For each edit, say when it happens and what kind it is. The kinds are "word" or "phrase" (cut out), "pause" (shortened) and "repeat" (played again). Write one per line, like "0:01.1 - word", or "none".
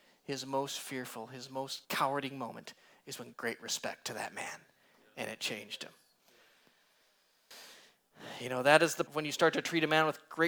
0:01.8 - pause
0:03.3 - phrase
0:09.1 - word